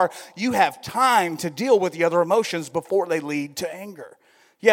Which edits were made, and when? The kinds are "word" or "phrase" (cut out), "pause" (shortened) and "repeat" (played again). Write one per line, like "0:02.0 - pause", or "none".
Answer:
none